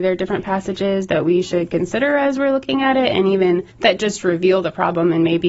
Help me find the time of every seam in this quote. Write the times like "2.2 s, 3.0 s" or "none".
3.7 s